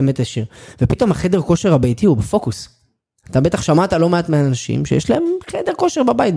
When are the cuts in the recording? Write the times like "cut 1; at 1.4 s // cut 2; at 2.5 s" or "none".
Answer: none